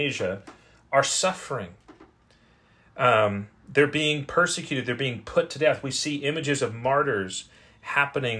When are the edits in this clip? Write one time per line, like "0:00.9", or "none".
none